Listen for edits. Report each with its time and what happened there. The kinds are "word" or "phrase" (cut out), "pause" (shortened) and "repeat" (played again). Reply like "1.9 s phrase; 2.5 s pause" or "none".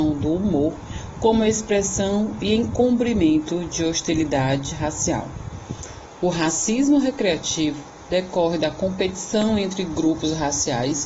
none